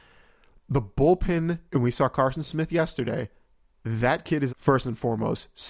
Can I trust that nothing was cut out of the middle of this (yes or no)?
no